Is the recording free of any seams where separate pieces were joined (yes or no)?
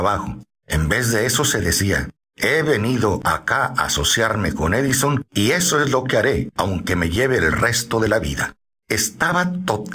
yes